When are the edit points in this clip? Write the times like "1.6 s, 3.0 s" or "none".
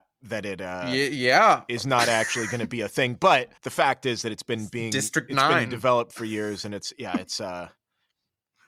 3.6 s